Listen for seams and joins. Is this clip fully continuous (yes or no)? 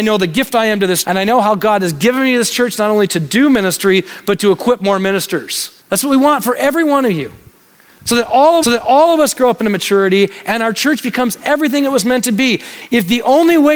no